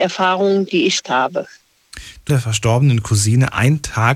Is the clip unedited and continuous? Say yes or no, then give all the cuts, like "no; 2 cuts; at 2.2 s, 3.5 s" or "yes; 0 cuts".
no; 2 cuts; at 1.0 s, 2.3 s